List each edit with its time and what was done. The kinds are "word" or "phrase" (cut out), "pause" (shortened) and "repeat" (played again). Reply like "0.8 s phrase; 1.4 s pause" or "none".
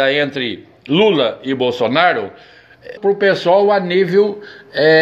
3.0 s phrase